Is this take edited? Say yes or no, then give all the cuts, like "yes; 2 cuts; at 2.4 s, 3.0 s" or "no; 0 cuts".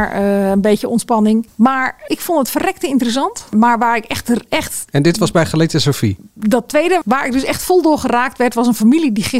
yes; 1 cut; at 2.1 s